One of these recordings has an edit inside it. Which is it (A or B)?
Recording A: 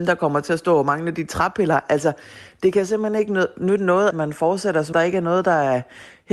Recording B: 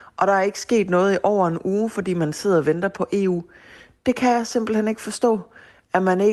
A